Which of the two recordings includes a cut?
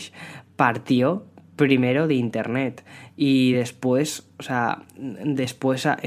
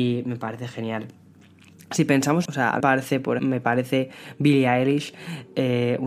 second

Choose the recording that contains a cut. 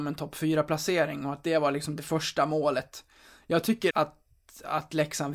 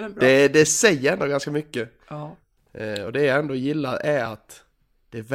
first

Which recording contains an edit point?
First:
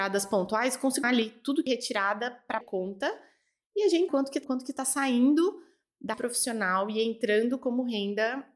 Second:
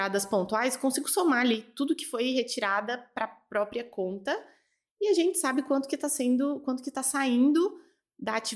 first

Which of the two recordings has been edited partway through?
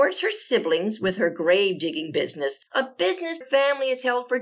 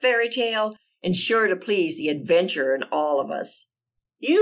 first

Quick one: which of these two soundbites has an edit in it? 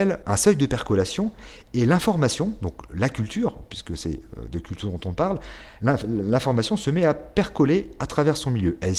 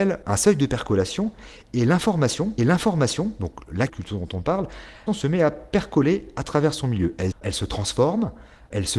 second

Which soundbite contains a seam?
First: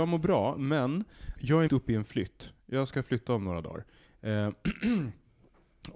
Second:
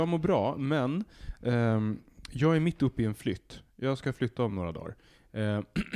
first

